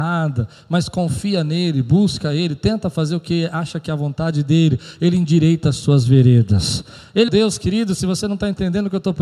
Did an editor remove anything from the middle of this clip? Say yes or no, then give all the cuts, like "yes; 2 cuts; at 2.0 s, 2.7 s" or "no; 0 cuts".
yes; 1 cut; at 7.3 s